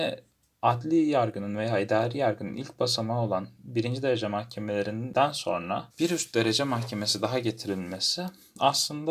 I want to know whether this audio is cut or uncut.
cut